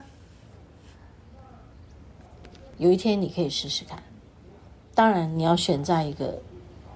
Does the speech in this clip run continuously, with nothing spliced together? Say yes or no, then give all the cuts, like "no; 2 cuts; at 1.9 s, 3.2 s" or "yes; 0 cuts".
yes; 0 cuts